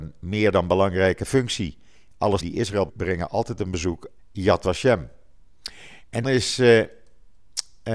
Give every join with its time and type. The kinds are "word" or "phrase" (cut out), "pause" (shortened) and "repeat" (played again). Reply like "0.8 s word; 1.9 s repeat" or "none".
2.4 s word; 2.9 s word; 4.2 s word; 6.2 s word